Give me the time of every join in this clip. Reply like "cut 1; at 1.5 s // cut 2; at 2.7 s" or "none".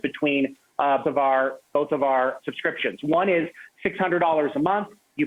cut 1; at 1.0 s // cut 2; at 2.4 s